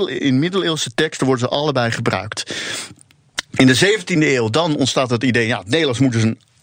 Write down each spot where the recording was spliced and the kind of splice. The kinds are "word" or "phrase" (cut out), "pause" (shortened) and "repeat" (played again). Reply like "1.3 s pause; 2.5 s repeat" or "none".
none